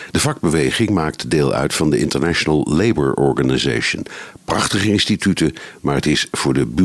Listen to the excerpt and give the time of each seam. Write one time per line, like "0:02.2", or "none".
none

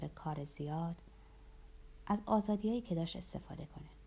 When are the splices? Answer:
none

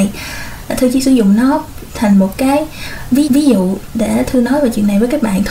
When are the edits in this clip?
0:03.3

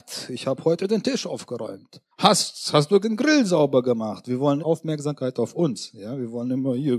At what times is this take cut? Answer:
0:02.1
0:03.0
0:04.6

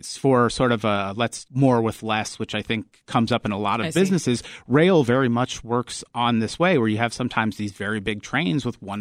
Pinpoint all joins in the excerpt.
0:01.4

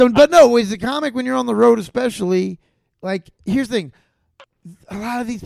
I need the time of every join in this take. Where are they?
none

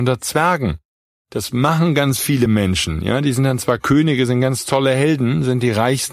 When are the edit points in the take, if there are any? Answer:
none

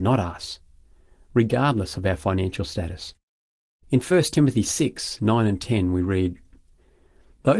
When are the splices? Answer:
none

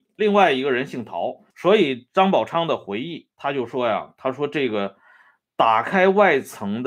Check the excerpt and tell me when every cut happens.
0:01.5
0:03.3

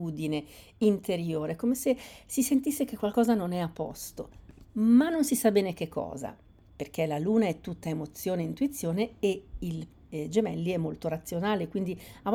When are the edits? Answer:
none

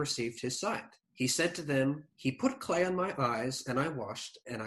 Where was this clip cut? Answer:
0:01.0
0:02.1

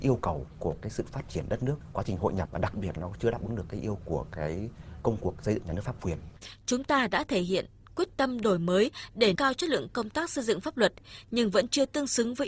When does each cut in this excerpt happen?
0:01.9
0:03.0
0:04.0
0:09.3

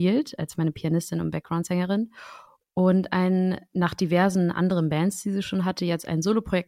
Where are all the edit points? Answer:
none

